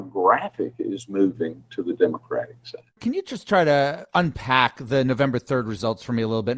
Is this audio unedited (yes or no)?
no